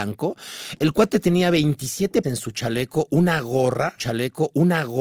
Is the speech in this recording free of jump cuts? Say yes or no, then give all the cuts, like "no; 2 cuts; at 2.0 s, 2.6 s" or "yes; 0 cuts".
no; 2 cuts; at 2.2 s, 4.0 s